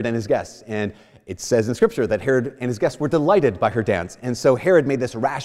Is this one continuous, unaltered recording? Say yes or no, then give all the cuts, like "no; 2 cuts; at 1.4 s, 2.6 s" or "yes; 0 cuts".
yes; 0 cuts